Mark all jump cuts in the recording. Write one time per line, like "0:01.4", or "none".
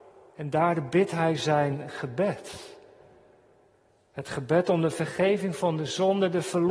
none

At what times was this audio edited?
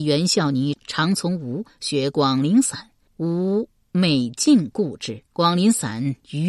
0:03.0
0:05.3

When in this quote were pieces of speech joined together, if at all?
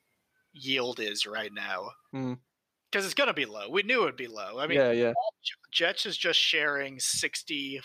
none

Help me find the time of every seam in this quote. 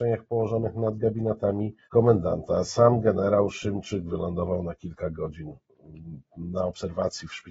0:01.8

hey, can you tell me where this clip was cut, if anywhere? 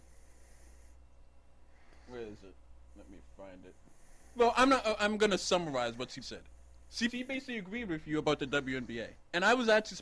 0:06.2
0:07.1

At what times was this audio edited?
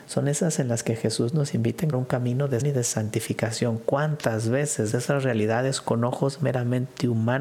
0:01.9
0:02.6
0:04.9

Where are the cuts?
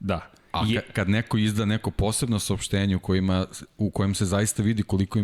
none

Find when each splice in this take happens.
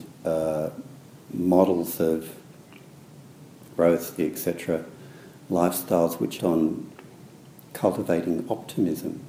0:03.8
0:04.2
0:06.4

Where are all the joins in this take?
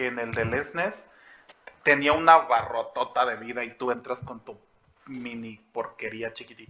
none

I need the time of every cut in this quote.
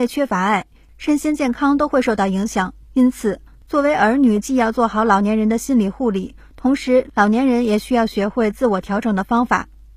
0:02.8

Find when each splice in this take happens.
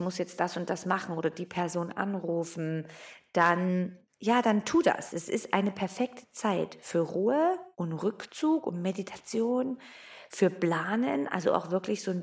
0:04.1
0:07.7

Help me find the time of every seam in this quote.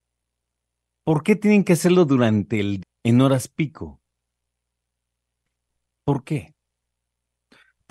0:02.8

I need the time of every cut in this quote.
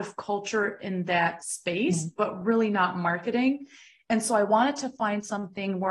none

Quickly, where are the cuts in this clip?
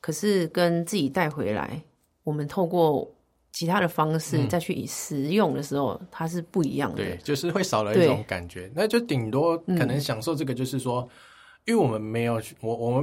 none

